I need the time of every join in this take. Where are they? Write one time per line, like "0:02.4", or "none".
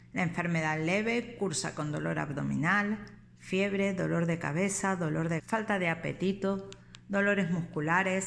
0:05.4